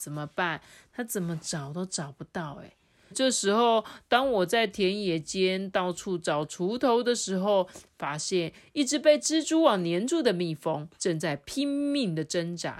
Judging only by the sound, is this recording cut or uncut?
cut